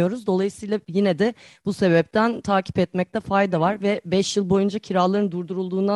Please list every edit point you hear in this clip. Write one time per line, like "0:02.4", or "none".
none